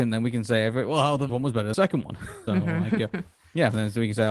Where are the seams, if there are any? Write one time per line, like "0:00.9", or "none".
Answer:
0:01.3
0:01.7
0:02.5

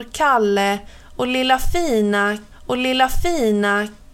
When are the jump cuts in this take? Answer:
0:02.5

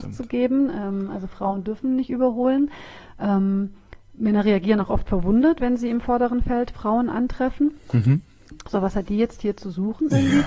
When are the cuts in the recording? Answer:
none

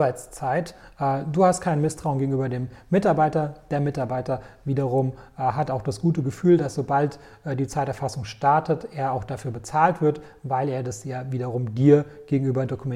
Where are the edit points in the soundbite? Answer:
none

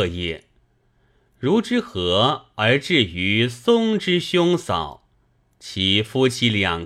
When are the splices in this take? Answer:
none

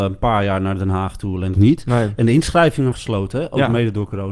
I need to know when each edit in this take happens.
0:01.5
0:02.9

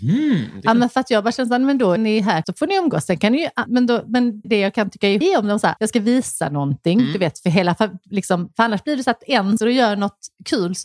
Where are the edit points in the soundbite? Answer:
0:02.0
0:02.4
0:03.7
0:04.4
0:05.2
0:05.8
0:09.6

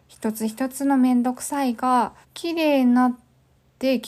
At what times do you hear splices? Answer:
0:02.2

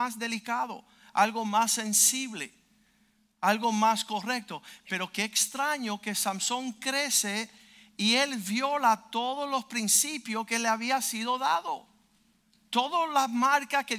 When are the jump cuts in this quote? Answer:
none

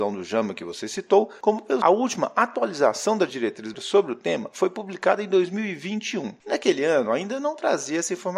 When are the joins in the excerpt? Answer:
0:01.8
0:03.7

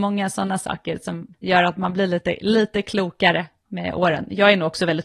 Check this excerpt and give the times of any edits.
0:01.3

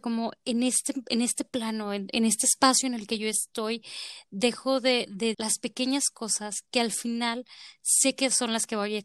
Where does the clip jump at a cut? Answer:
0:05.3

